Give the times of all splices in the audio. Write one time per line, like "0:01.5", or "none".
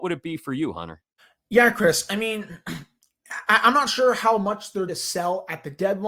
0:01.2
0:04.9